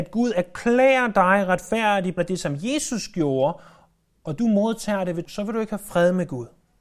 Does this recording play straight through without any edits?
no; 2 cuts; at 2.2 s, 5.2 s

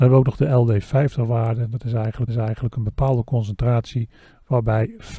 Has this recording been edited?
yes; 1 cut; at 2.3 s

